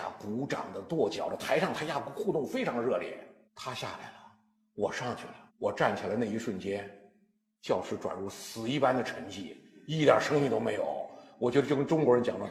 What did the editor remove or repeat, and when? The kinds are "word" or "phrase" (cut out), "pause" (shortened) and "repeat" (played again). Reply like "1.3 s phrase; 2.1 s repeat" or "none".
3.4 s pause; 5.5 s pause